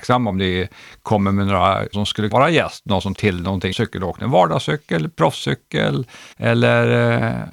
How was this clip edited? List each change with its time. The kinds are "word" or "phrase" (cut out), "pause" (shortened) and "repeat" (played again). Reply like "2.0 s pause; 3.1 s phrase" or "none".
1.9 s phrase; 2.3 s word; 3.1 s word; 3.7 s word; 6.3 s pause